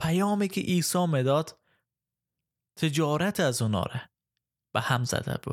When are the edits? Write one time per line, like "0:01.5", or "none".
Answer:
none